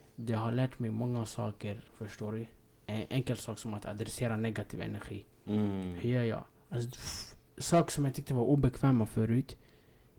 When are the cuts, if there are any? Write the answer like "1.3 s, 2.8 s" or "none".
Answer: 1.9 s